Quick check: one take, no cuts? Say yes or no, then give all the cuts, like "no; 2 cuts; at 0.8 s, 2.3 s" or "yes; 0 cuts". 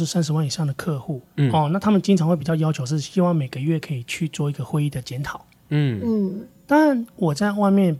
no; 1 cut; at 1.3 s